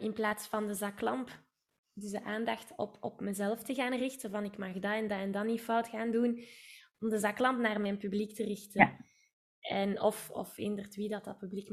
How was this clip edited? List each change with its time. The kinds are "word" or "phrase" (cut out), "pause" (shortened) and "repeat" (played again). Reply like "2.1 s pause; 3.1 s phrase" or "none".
none